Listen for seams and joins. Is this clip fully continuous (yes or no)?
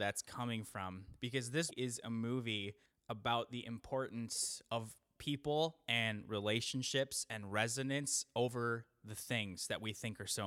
no